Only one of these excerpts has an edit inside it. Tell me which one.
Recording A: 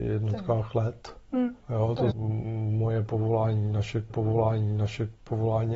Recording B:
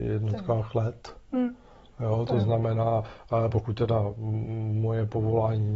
A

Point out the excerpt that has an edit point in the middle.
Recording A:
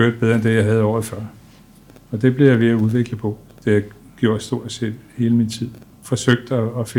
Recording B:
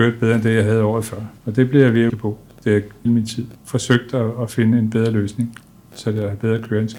B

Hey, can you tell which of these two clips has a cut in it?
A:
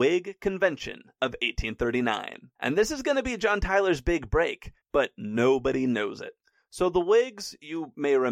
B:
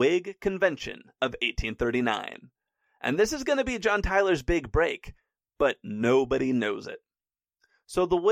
A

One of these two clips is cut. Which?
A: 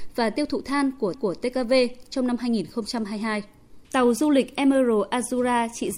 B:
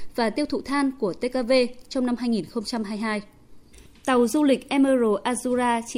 A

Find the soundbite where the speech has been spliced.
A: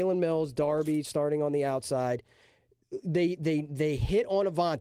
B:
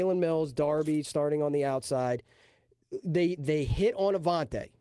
B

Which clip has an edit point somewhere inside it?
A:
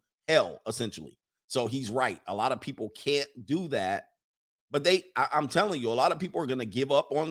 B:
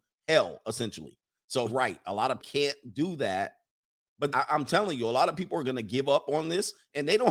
B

